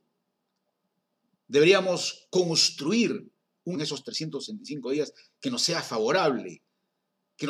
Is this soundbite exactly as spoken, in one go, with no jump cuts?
no; 1 cut; at 3.8 s

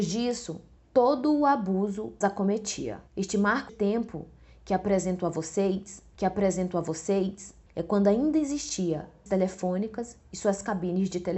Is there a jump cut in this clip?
yes; 5 cuts; at 2.2 s, 3.1 s, 3.7 s, 6.2 s, 9.3 s

